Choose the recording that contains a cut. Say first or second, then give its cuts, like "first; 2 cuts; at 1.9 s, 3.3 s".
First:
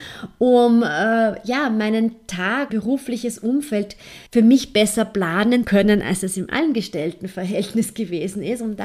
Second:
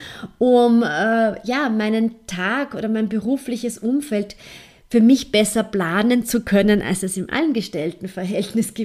first; 3 cuts; at 2.7 s, 4.3 s, 5.6 s